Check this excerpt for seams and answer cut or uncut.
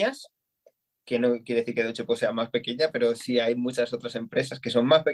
uncut